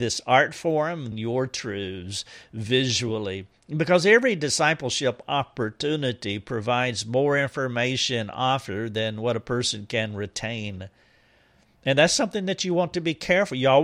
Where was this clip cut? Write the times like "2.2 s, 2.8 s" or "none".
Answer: 1.1 s